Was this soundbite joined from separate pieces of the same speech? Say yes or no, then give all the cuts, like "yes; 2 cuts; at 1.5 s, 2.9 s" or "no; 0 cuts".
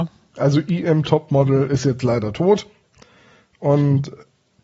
no; 0 cuts